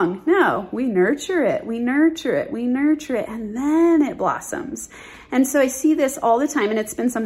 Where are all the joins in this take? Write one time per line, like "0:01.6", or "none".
none